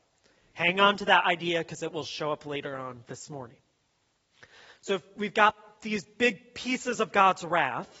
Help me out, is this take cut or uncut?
uncut